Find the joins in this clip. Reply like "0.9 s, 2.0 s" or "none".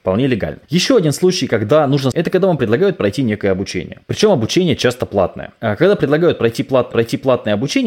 2.1 s, 6.9 s

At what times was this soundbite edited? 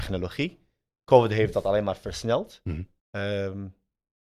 3.0 s

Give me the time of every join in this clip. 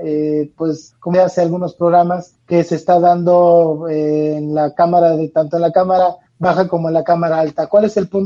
1.1 s

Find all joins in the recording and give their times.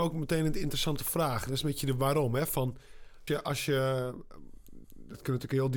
3.3 s, 4.8 s

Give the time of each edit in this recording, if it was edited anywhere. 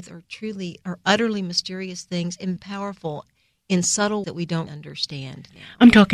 2.6 s, 4.2 s, 4.7 s

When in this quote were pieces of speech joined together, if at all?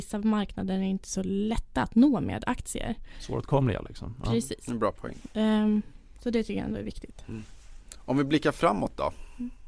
none

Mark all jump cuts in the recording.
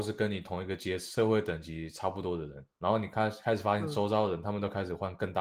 2.7 s

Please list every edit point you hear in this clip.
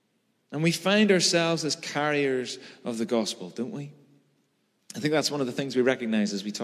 none

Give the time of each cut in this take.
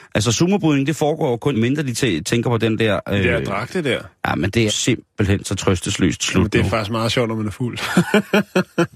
1.5 s, 4.7 s

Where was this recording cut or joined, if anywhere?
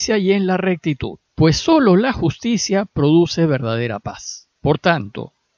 1.3 s, 4.6 s

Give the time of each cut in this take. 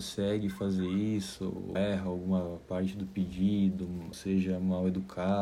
1.8 s, 4.1 s

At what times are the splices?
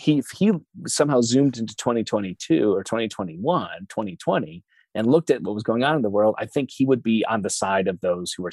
none

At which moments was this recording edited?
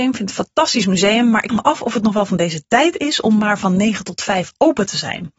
1.5 s

